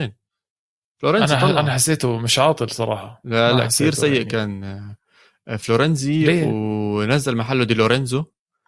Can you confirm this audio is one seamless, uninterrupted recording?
yes; 0 cuts

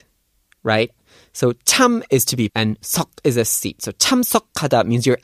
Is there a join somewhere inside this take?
yes; 1 cut; at 2.5 s

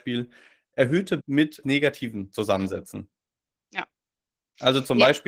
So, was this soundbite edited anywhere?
yes; 2 cuts; at 1.2 s, 1.6 s

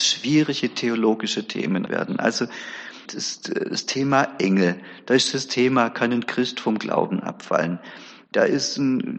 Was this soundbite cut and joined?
yes; 2 cuts; at 1.9 s, 3.1 s

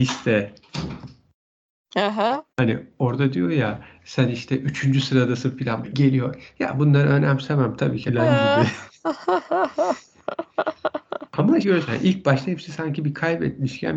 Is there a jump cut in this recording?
yes; 4 cuts; at 2.5 s, 5.8 s, 8.1 s, 11.6 s

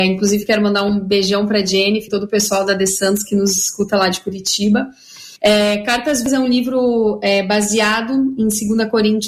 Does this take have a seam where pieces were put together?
yes; 2 cuts; at 2.1 s, 5.4 s

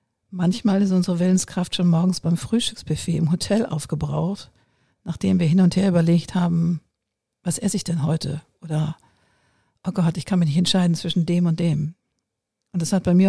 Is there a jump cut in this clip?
no; 0 cuts

